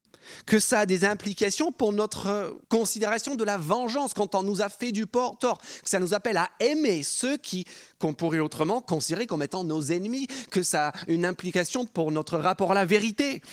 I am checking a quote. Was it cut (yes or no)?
yes